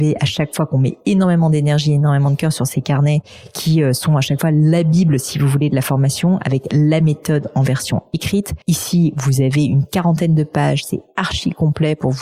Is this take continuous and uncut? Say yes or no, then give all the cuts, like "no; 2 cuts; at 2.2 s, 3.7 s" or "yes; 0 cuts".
no; 1 cut; at 8.6 s